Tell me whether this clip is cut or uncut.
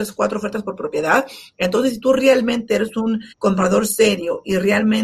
cut